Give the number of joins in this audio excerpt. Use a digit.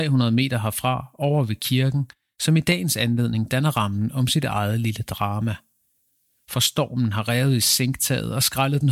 0